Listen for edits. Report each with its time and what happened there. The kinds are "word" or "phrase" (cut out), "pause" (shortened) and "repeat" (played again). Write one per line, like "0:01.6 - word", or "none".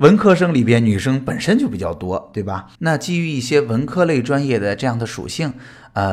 0:02.8 - pause